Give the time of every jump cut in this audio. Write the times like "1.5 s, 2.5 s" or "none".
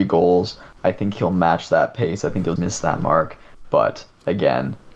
2.6 s

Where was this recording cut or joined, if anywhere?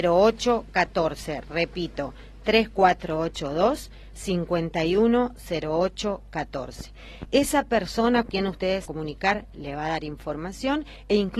8.3 s, 8.9 s

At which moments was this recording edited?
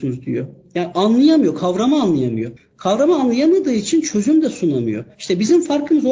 5.1 s

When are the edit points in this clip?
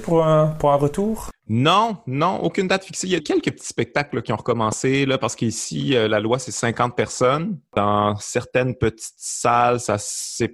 3.2 s

